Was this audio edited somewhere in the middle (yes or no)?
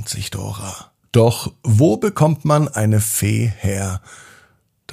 yes